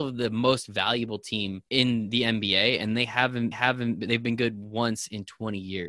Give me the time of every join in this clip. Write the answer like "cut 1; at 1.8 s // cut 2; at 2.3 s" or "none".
cut 1; at 1.7 s // cut 2; at 3.5 s